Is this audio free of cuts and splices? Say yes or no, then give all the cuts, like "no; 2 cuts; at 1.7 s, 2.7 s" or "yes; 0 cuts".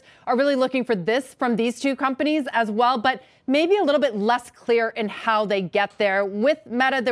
yes; 0 cuts